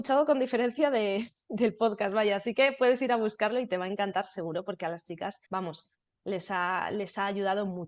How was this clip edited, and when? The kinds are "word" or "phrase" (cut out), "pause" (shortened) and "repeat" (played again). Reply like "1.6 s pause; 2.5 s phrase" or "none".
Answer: 5.5 s pause